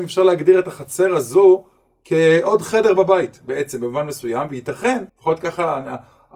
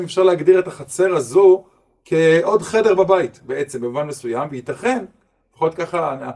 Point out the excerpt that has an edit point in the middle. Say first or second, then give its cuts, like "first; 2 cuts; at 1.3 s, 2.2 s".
first; 1 cut; at 5.1 s